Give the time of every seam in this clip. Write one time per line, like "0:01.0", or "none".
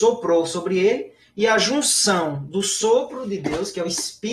none